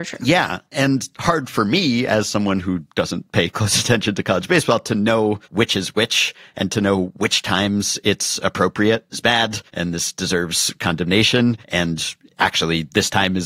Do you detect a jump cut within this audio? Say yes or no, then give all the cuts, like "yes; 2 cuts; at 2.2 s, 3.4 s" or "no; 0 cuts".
yes; 5 cuts; at 1.1 s, 5.4 s, 9.1 s, 9.7 s, 11.6 s